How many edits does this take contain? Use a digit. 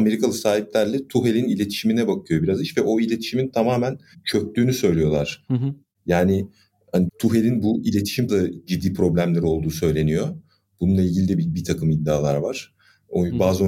2